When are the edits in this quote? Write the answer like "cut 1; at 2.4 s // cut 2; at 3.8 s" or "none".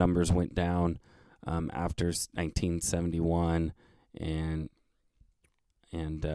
none